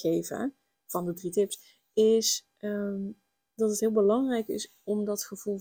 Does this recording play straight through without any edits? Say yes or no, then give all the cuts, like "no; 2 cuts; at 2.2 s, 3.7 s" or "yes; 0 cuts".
yes; 0 cuts